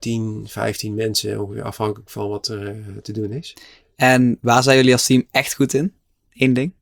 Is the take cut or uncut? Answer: uncut